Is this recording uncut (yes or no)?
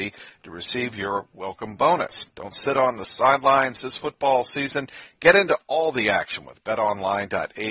no